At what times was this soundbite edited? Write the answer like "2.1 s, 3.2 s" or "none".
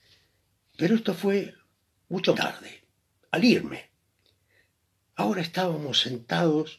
2.3 s